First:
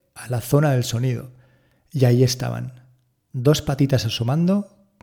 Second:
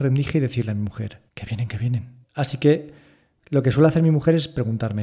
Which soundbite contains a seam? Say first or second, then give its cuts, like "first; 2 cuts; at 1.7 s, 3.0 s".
second; 2 cuts; at 1.3 s, 2.2 s